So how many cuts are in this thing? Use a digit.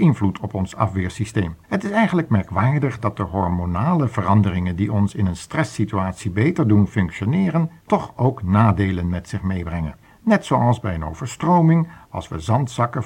3